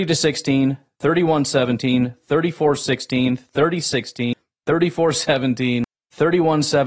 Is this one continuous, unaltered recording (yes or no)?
yes